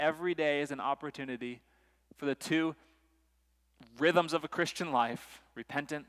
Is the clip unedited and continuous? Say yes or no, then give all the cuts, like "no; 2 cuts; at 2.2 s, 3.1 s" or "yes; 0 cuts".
yes; 0 cuts